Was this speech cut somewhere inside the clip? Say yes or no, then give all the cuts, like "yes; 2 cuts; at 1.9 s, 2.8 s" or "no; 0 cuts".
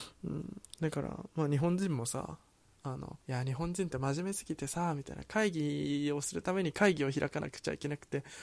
yes; 1 cut; at 3.2 s